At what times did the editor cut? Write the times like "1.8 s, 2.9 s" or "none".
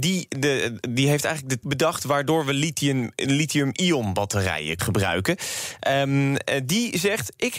1.6 s, 4.8 s